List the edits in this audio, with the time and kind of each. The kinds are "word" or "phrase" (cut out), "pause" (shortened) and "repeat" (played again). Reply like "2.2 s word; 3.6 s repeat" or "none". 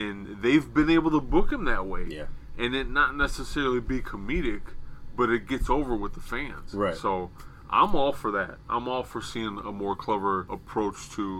none